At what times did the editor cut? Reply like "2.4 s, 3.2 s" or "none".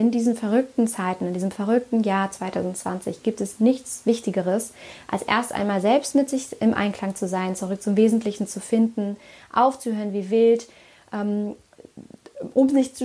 none